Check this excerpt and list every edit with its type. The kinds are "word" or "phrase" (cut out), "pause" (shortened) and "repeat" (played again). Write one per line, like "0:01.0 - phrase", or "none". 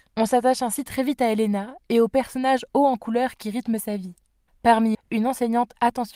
0:04.9 - word